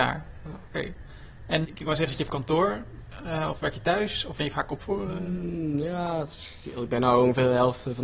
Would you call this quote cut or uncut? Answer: cut